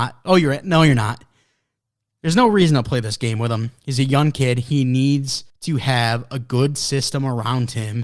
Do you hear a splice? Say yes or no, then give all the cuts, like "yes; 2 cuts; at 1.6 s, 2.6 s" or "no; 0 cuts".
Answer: yes; 1 cut; at 5.5 s